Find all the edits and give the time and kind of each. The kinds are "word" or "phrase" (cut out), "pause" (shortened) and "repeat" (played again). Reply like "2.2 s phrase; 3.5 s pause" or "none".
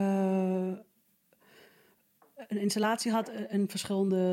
none